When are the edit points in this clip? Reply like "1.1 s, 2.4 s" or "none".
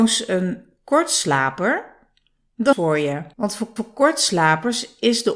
2.7 s, 3.3 s, 3.8 s